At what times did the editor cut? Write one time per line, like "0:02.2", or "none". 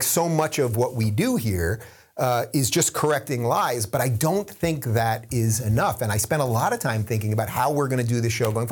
none

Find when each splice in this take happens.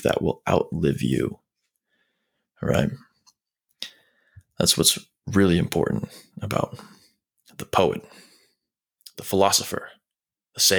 none

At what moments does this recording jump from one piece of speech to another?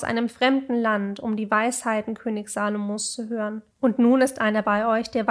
0:03.7

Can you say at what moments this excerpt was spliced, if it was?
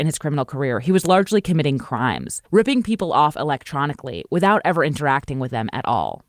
0:02.5

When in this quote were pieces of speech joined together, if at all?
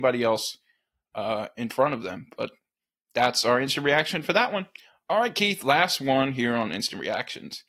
none

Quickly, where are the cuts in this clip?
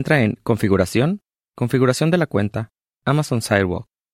none

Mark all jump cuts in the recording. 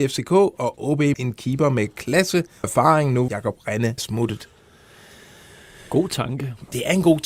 0:01.1
0:02.6
0:03.3
0:04.0

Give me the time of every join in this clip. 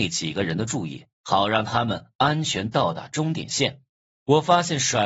0:01.1
0:04.0

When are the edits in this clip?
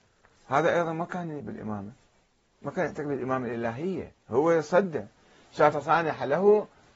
0:01.4
0:04.2
0:05.7

